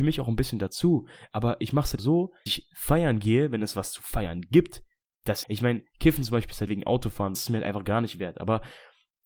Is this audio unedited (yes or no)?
no